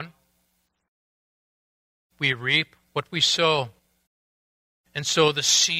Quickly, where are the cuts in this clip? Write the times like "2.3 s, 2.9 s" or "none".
4.1 s